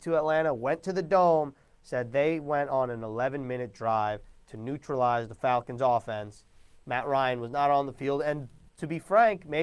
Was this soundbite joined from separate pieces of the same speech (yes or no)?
no